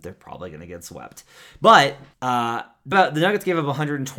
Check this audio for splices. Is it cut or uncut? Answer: cut